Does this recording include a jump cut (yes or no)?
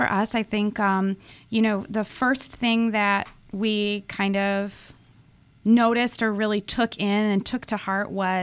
no